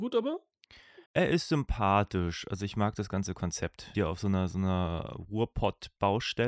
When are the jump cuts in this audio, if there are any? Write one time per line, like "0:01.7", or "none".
0:01.1
0:03.9